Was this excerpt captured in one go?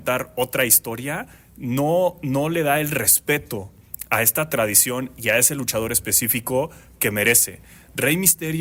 yes; 0 cuts

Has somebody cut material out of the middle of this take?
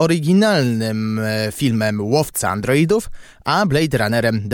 no; 0 cuts

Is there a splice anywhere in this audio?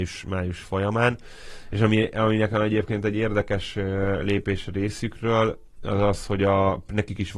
no; 0 cuts

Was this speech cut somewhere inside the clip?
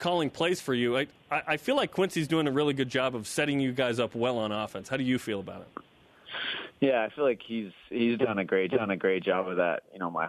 yes; 1 cut; at 8.7 s

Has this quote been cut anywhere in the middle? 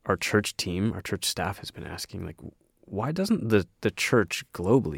no; 0 cuts

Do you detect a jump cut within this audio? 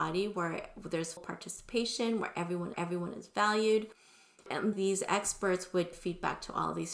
yes; 4 cuts; at 1.2 s, 2.7 s, 4.7 s, 5.9 s

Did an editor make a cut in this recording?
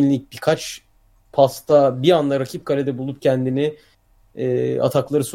no; 0 cuts

